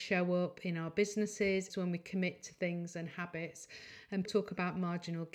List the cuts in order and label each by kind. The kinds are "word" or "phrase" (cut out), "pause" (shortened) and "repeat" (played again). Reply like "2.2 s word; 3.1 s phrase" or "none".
1.7 s phrase; 4.2 s word